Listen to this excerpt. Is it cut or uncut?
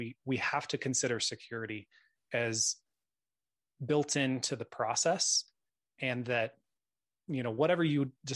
uncut